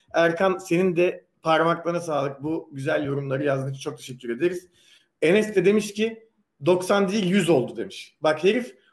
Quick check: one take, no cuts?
yes; 0 cuts

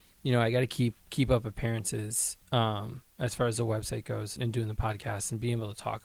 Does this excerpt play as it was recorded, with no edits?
no; 3 cuts; at 1.0 s, 2.4 s, 4.4 s

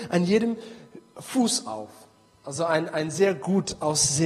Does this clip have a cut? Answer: no; 0 cuts

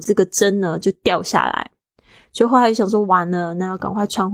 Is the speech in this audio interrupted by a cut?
no; 0 cuts

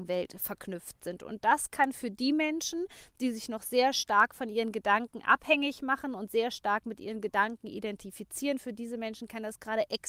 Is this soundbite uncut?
yes; 0 cuts

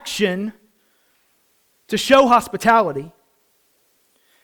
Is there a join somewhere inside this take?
no; 0 cuts

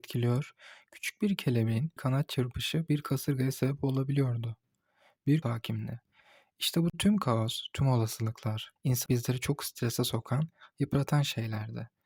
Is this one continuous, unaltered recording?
no; 4 cuts; at 2.0 s, 5.4 s, 8.8 s, 9.1 s

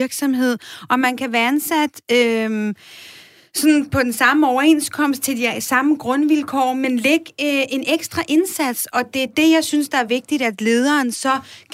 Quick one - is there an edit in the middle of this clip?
no; 0 cuts

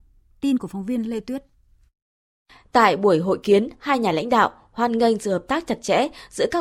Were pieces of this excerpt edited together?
no; 0 cuts

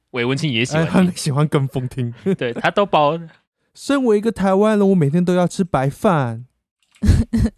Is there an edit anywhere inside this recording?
no; 0 cuts

